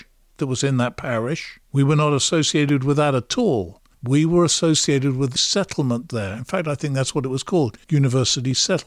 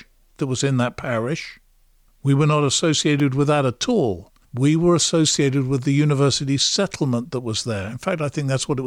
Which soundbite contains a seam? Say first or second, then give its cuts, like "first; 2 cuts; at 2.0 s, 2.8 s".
first; 4 cuts; at 1.6 s, 5.4 s, 6.1 s, 7.8 s